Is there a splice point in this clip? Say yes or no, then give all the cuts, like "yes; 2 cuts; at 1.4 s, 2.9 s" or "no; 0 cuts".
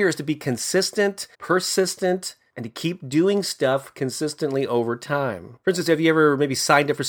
yes; 2 cuts; at 1.3 s, 5.6 s